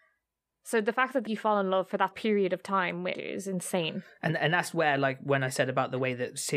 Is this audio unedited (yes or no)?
no